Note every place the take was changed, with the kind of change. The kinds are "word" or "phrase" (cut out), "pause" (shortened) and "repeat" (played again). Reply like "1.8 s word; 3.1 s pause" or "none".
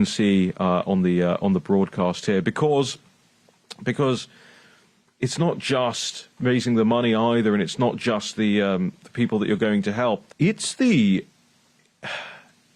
6.3 s pause; 10.3 s pause